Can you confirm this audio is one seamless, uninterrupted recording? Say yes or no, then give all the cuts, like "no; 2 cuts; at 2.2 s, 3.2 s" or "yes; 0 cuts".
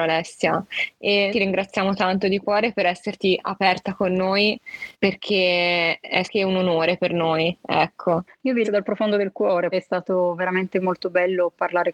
no; 5 cuts; at 1.3 s, 4.9 s, 6.2 s, 8.6 s, 9.7 s